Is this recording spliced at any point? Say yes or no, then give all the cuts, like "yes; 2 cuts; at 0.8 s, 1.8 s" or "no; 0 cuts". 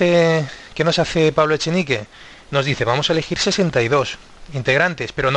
no; 0 cuts